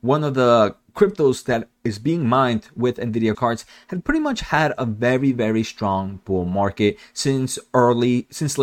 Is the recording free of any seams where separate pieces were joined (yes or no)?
no